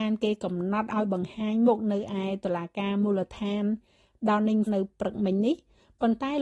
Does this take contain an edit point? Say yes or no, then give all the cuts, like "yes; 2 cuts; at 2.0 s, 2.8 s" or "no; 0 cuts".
yes; 1 cut; at 4.7 s